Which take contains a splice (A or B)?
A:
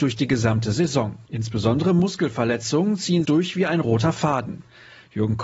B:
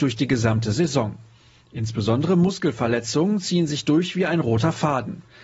A